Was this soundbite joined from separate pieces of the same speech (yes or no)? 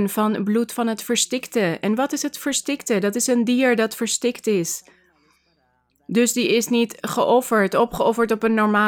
no